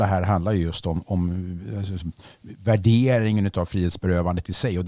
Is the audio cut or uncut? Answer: uncut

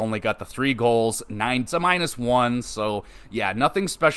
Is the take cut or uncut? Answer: cut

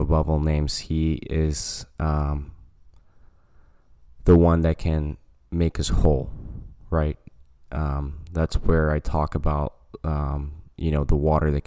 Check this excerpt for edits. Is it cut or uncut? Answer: uncut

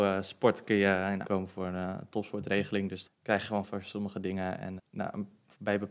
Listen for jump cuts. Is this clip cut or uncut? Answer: cut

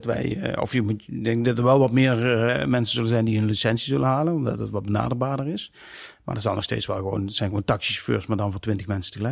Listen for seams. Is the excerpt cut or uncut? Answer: uncut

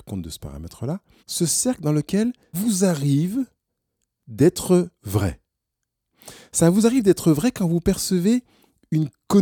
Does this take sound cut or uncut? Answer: cut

